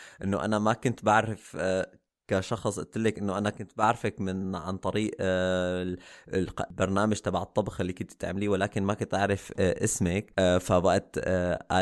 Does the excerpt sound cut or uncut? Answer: uncut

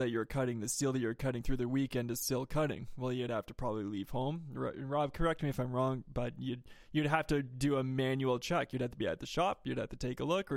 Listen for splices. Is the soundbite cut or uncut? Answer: uncut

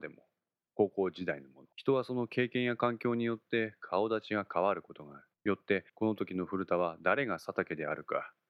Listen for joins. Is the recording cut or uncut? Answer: cut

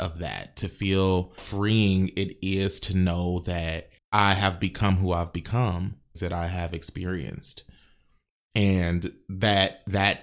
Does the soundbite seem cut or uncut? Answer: cut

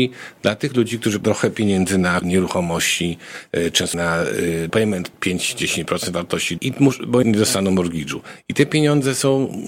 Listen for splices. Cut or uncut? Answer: cut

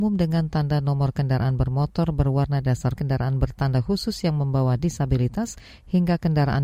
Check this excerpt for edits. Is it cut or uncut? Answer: cut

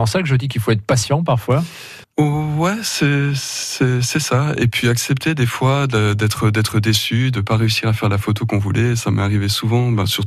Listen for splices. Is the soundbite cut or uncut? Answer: cut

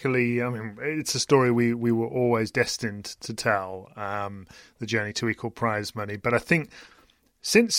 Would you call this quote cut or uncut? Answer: uncut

